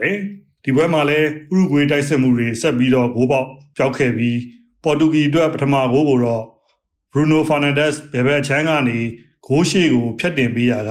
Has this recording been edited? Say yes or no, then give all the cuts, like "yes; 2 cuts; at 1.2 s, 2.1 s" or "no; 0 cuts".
no; 0 cuts